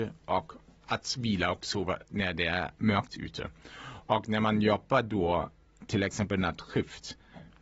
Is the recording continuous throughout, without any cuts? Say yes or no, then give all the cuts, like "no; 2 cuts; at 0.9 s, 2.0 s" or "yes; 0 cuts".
yes; 0 cuts